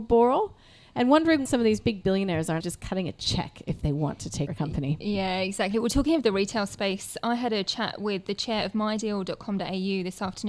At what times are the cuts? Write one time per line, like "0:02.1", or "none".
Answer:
0:01.5
0:02.6
0:04.5